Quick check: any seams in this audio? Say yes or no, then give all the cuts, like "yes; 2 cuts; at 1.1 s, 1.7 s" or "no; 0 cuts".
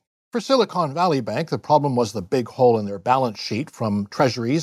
no; 0 cuts